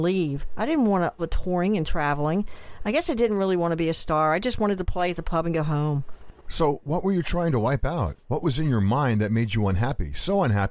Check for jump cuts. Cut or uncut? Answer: cut